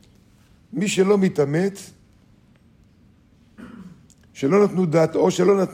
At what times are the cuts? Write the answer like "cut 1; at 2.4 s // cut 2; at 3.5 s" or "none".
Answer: none